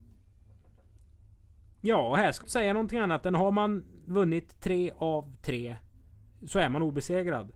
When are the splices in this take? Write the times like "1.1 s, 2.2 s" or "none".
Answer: 2.4 s